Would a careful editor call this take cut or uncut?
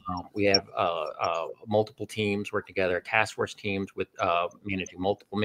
uncut